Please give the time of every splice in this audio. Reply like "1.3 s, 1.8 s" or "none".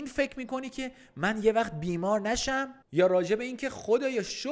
2.8 s